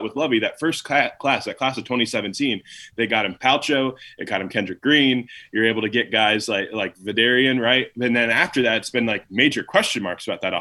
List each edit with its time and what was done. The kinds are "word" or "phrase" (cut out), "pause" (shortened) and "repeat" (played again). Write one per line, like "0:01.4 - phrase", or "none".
none